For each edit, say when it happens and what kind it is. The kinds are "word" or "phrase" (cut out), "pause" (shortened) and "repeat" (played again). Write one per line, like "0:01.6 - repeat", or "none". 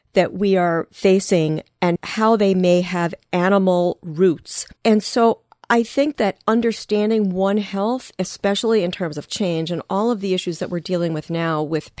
0:04.8 - pause
0:05.6 - pause
0:09.3 - word